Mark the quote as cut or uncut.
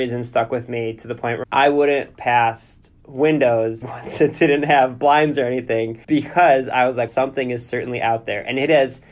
cut